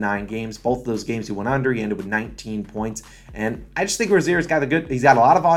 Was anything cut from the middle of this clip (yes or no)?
no